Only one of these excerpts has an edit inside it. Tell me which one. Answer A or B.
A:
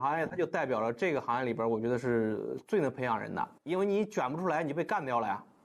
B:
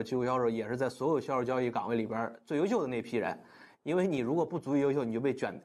A